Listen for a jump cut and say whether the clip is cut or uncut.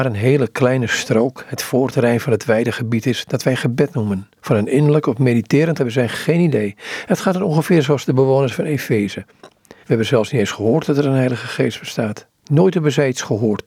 cut